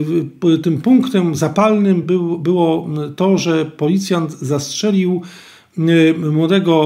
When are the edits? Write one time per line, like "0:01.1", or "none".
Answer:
none